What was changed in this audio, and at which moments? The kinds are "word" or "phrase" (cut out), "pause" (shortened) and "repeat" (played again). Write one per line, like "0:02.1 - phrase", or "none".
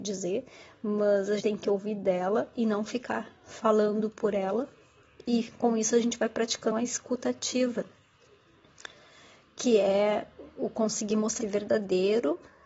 0:01.4 - word
0:06.7 - word
0:11.4 - word